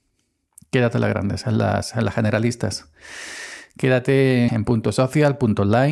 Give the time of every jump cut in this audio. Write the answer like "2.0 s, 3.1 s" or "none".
4.5 s